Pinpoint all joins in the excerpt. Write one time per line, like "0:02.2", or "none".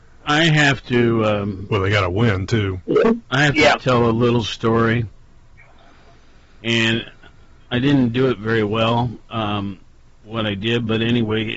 none